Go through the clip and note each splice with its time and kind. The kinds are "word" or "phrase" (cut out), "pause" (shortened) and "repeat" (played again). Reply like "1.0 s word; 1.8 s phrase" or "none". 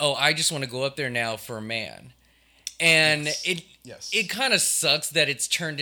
none

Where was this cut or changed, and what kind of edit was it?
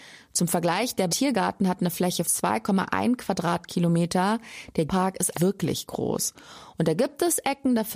1.1 s word; 2.2 s word; 4.9 s word; 5.3 s word

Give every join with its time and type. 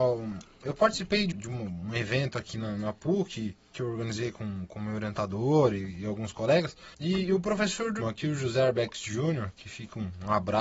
1.3 s word; 6.9 s pause; 8.0 s word

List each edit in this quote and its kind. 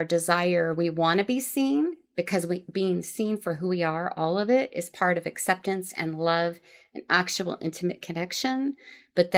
none

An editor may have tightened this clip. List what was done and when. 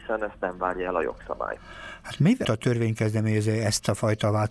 2.4 s word

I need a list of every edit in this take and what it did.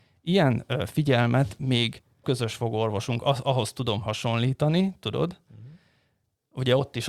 2.2 s phrase

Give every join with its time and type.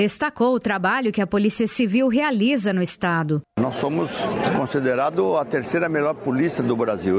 none

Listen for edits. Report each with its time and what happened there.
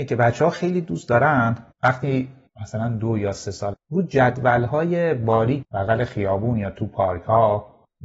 3.7 s word; 5.6 s word

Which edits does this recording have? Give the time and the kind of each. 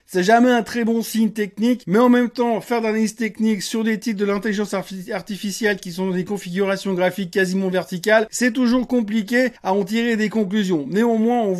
9.6 s pause

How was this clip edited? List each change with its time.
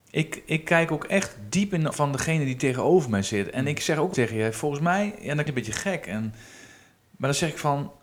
1.9 s word; 4.1 s word; 5.5 s word

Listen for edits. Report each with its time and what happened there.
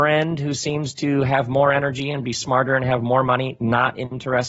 none

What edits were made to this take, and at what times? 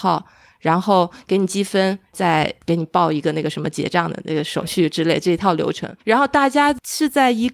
6.0 s pause

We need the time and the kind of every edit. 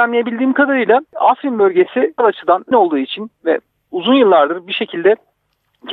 1.1 s pause; 2.2 s word; 2.7 s word

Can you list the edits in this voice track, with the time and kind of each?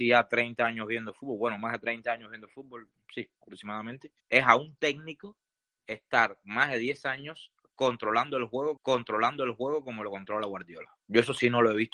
4.2 s pause; 5.6 s pause; 8.8 s repeat; 11.0 s pause

